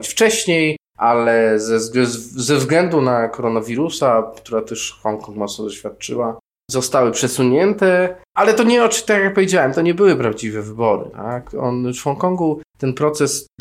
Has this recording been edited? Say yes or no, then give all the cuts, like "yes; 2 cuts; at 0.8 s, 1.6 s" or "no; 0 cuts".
no; 0 cuts